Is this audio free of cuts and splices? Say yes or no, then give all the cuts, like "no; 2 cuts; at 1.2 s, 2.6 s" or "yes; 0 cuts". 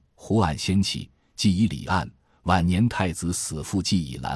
yes; 0 cuts